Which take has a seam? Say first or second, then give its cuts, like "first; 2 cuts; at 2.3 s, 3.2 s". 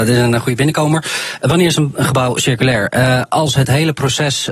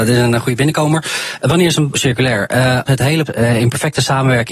second; 3 cuts; at 1.9 s, 2.9 s, 3.3 s